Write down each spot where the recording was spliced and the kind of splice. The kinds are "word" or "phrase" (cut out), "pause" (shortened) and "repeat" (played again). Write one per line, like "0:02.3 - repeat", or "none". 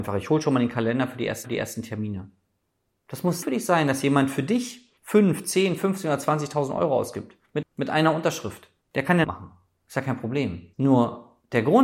0:01.4 - repeat
0:03.4 - word
0:05.0 - pause
0:07.6 - word
0:08.8 - pause
0:09.2 - phrase
0:10.7 - pause